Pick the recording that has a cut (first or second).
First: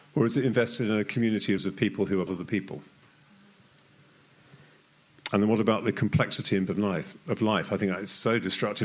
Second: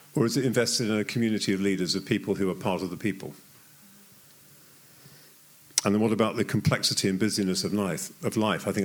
first